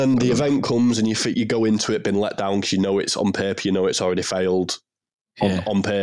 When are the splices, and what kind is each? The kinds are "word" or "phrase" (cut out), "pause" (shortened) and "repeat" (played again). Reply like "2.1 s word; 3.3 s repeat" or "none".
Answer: 1.3 s word